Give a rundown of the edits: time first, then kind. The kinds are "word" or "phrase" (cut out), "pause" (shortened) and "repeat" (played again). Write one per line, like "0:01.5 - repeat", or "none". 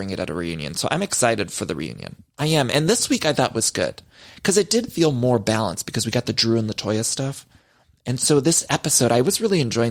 none